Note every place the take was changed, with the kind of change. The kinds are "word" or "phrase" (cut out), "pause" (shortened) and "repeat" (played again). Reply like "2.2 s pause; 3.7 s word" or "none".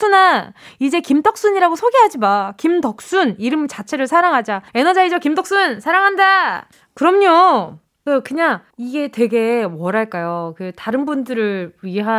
4.7 s pause; 6.7 s pause; 8.7 s pause